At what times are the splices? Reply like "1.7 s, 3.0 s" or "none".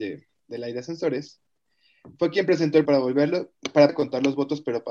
2.8 s, 3.9 s

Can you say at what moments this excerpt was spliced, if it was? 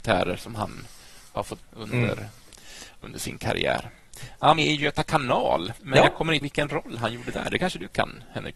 1.6 s, 4.6 s, 5.8 s, 6.4 s

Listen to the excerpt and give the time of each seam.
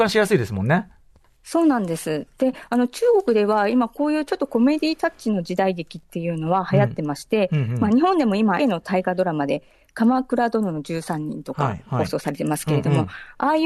8.6 s

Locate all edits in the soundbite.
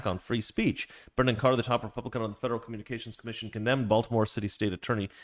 none

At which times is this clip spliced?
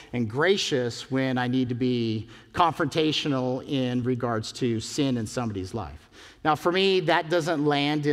none

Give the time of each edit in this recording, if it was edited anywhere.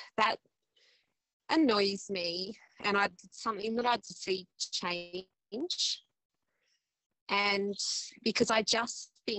3.2 s, 4.0 s

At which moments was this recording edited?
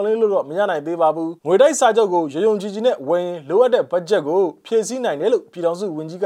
1.4 s

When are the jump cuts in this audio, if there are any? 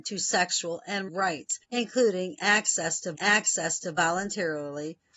1.1 s, 1.6 s, 3.1 s

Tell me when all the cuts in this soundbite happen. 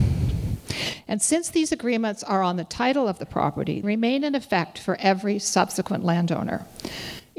3.8 s

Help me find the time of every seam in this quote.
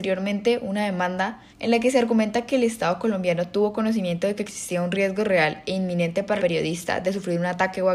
1.5 s, 6.4 s

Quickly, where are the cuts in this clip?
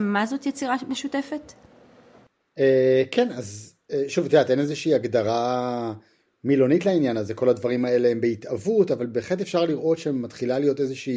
none

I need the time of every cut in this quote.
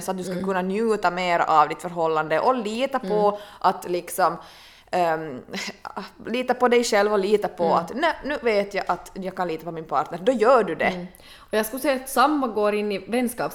none

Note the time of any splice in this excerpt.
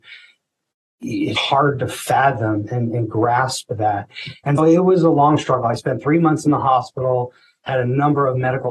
1.4 s, 4.6 s

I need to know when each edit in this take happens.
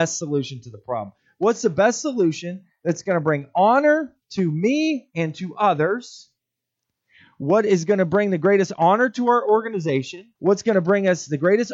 10.4 s

